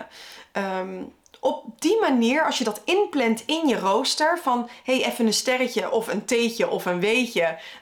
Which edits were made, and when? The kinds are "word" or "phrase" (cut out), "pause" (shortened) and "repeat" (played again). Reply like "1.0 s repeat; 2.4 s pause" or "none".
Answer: none